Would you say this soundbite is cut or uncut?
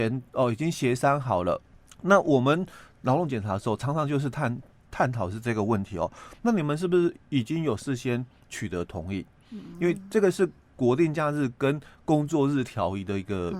cut